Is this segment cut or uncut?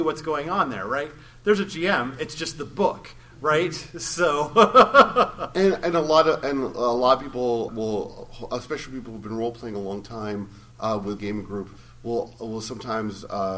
cut